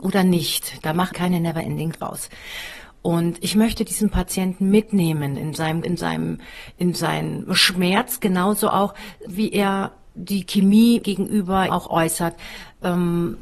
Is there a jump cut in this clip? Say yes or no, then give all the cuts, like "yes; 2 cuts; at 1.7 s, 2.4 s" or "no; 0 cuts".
yes; 6 cuts; at 1.1 s, 1.9 s, 5.8 s, 9.3 s, 11.0 s, 11.7 s